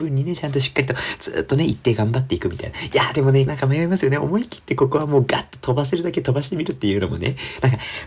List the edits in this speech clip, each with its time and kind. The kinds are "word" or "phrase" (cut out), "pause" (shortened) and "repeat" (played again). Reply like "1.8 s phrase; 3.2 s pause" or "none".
3.5 s phrase